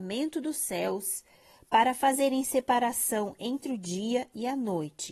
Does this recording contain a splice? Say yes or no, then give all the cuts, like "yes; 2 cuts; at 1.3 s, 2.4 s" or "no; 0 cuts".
no; 0 cuts